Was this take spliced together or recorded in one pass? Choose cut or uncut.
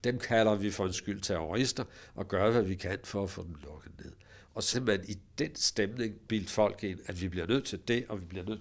cut